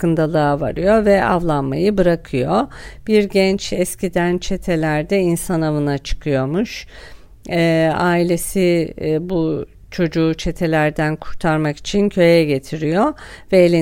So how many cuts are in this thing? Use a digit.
0